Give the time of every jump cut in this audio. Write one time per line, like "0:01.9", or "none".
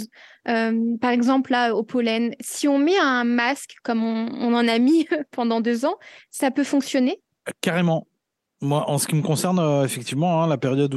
none